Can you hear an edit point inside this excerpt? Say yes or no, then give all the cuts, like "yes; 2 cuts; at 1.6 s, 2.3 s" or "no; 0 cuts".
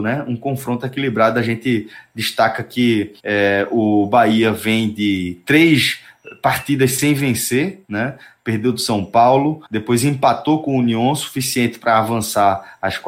yes; 2 cuts; at 3.2 s, 9.7 s